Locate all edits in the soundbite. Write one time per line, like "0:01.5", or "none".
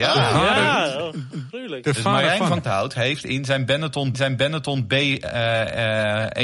0:01.3
0:02.6
0:04.1